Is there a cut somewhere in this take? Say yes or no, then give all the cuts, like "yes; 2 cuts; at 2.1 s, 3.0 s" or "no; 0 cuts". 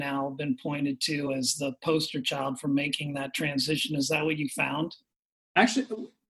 no; 0 cuts